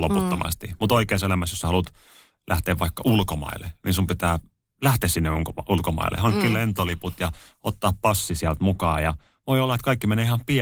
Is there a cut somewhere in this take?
no; 0 cuts

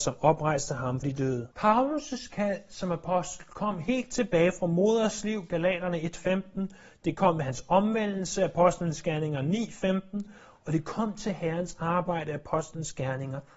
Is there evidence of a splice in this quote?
yes; 2 cuts; at 1.0 s, 1.5 s

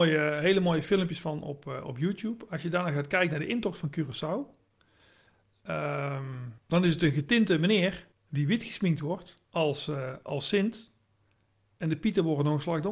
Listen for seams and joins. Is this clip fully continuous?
no; 3 cuts; at 6.6 s, 8.1 s, 9.4 s

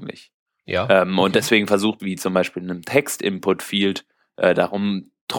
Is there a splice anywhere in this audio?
yes; 1 cut; at 2.0 s

